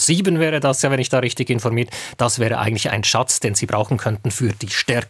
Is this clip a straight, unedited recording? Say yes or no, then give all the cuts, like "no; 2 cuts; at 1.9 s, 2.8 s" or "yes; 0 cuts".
yes; 0 cuts